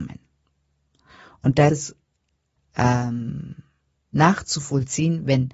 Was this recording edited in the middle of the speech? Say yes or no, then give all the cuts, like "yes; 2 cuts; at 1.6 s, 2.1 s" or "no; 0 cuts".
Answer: yes; 3 cuts; at 1.7 s, 2.6 s, 3.9 s